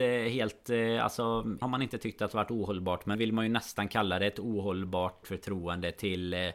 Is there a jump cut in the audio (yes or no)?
yes